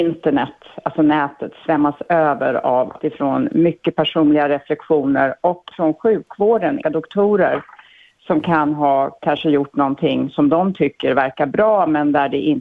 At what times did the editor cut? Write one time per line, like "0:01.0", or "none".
0:03.0
0:05.7
0:06.8